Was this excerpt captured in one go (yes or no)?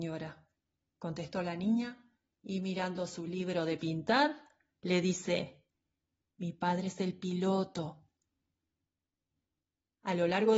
yes